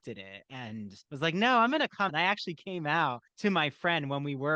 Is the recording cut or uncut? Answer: cut